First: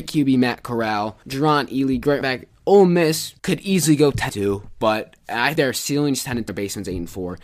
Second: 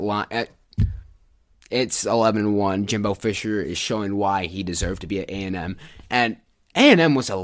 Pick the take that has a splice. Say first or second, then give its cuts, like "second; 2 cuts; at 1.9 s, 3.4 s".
first; 6 cuts; at 1.2 s, 2.2 s, 3.4 s, 4.3 s, 5.6 s, 6.5 s